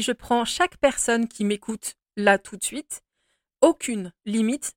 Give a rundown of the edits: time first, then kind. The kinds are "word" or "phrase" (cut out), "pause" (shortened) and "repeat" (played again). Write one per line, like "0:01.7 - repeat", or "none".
none